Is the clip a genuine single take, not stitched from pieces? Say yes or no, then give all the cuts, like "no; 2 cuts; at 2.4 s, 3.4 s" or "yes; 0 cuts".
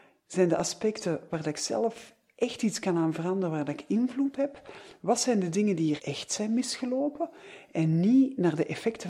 no; 2 cuts; at 4.3 s, 6.0 s